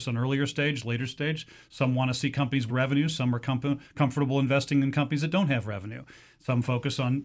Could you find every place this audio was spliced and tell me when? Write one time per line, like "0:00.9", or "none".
0:02.7